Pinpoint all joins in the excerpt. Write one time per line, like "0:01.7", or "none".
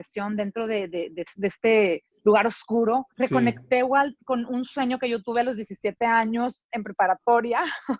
0:03.1